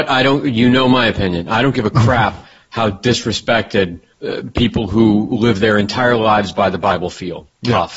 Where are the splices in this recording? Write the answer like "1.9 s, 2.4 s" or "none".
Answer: 4.1 s